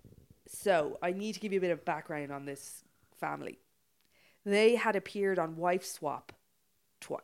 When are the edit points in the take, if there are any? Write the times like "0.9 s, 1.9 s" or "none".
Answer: none